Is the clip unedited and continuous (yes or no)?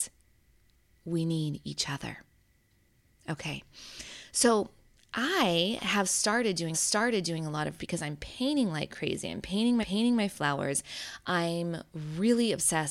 no